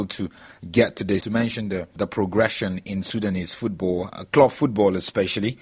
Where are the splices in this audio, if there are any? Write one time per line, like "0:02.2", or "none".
0:01.2